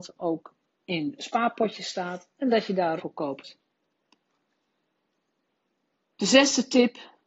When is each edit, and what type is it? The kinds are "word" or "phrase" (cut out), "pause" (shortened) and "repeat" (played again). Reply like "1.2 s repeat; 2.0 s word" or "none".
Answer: 2.3 s pause; 3.0 s phrase